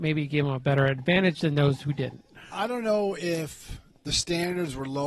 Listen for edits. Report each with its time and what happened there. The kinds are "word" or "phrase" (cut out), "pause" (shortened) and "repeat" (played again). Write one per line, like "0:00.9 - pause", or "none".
none